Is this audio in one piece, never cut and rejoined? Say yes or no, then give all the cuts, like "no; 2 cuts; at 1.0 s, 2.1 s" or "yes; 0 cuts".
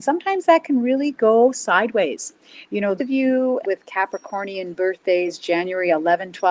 no; 2 cuts; at 3.0 s, 3.6 s